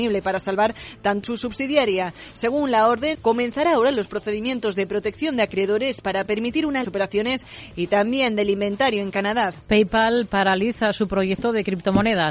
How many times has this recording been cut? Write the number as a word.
three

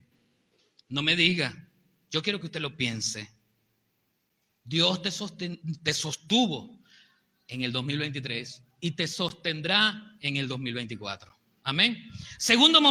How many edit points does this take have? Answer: zero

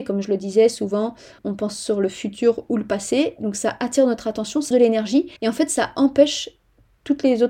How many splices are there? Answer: three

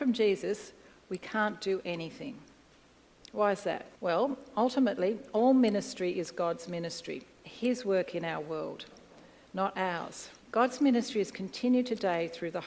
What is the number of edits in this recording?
two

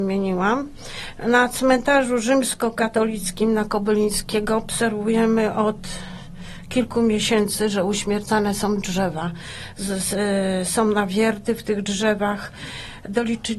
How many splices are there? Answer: zero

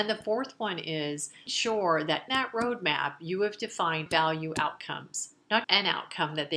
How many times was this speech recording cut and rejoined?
four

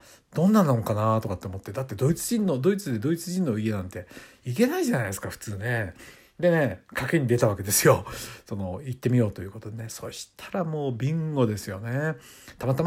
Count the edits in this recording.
zero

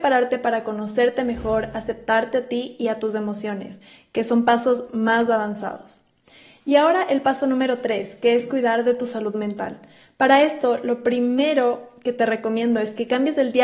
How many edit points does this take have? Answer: zero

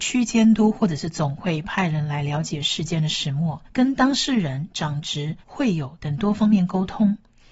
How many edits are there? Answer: two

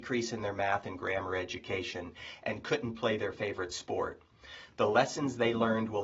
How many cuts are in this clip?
zero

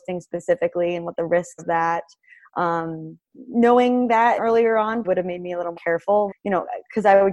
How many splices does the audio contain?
six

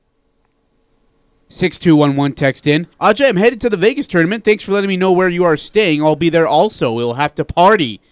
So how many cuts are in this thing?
one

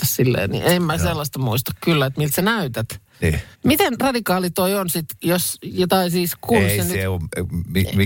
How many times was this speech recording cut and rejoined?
one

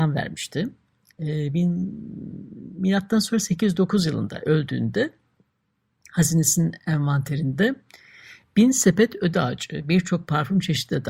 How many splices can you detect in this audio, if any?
zero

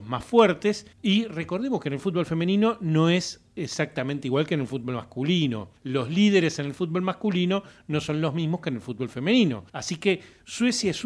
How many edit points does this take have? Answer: three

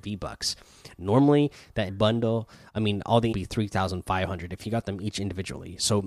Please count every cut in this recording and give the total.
two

